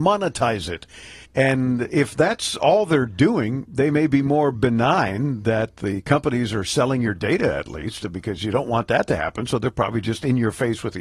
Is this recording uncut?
no; 1 cut; at 1.2 s

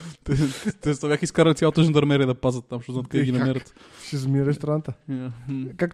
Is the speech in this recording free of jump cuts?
yes; 0 cuts

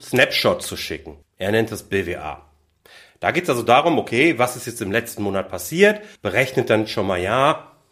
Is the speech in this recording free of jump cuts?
no; 2 cuts; at 1.2 s, 6.2 s

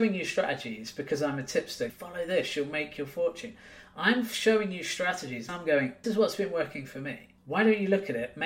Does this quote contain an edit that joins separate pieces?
yes; 4 cuts; at 1.9 s, 5.5 s, 6.0 s, 7.4 s

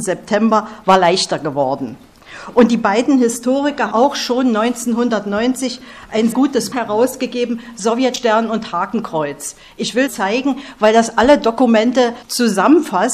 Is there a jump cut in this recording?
yes; 5 cuts; at 3.9 s, 6.3 s, 6.7 s, 10.1 s, 12.2 s

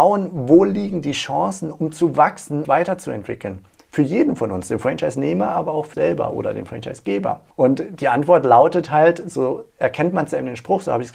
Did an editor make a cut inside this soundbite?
yes; 3 cuts; at 2.6 s, 5.9 s, 7.5 s

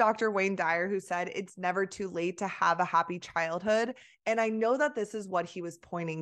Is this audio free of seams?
yes; 0 cuts

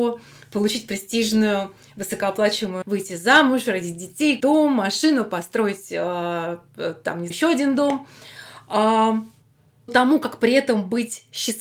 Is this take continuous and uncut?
no; 4 cuts; at 2.8 s, 4.4 s, 7.3 s, 9.9 s

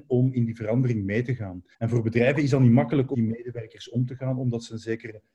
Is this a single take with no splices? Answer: no; 2 cuts; at 1.7 s, 3.1 s

